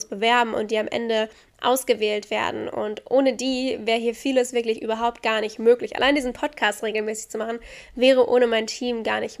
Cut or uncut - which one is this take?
uncut